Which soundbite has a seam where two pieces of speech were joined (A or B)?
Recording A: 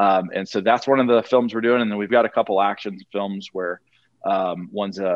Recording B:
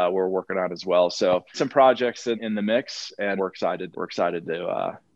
B